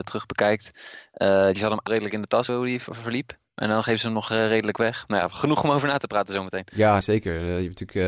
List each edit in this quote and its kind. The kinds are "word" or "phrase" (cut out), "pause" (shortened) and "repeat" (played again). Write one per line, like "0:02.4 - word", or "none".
0:01.5 - word
0:01.9 - phrase
0:02.5 - word
0:07.0 - word